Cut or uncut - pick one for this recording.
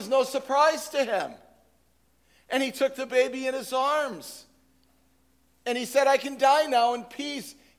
uncut